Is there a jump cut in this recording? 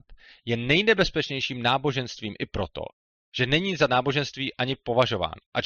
no; 0 cuts

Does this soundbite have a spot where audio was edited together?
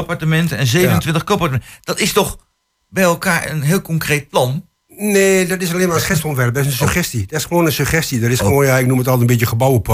no; 0 cuts

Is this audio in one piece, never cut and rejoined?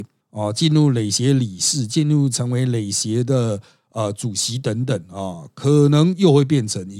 yes; 0 cuts

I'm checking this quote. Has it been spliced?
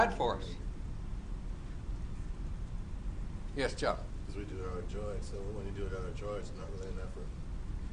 no; 0 cuts

